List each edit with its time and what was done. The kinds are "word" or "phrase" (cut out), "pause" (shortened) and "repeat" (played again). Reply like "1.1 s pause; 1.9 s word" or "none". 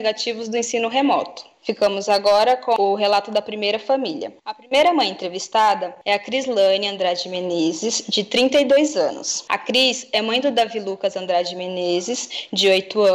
4.4 s pause